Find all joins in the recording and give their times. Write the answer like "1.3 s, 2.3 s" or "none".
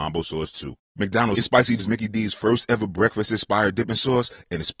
1.3 s, 1.8 s

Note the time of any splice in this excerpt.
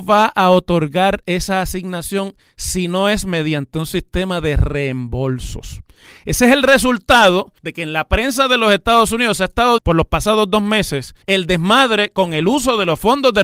7.6 s, 9.8 s, 11.2 s

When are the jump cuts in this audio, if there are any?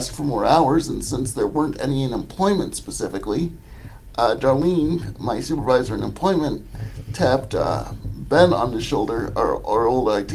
none

